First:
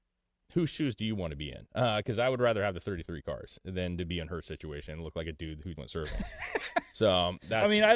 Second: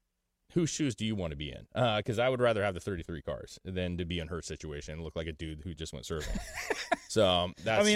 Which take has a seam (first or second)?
first